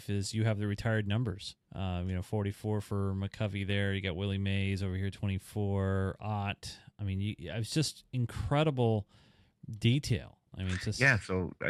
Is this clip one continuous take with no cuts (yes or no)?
no